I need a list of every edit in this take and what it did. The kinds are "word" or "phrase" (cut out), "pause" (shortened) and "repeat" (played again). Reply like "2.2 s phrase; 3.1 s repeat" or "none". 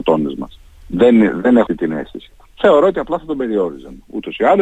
1.7 s word